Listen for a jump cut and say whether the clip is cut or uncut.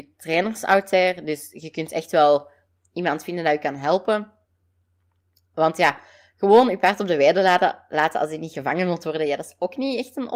uncut